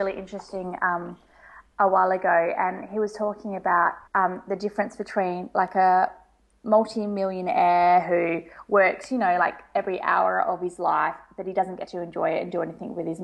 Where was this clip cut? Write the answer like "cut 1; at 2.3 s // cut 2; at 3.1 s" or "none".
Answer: cut 1; at 4.1 s